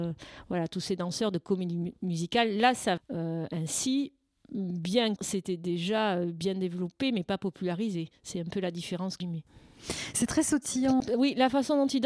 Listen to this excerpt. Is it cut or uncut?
cut